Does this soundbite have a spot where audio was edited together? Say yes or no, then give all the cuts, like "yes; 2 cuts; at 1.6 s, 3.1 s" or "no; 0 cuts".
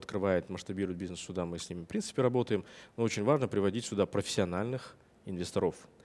no; 0 cuts